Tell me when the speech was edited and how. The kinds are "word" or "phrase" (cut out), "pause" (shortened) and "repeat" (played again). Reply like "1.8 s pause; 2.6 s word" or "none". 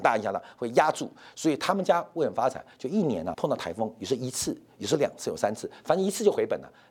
3.3 s word